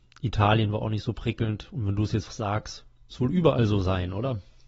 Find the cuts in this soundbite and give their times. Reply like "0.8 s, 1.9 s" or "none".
2.3 s, 3.1 s